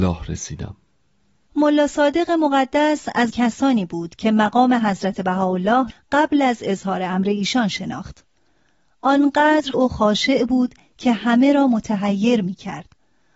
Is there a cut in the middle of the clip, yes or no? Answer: yes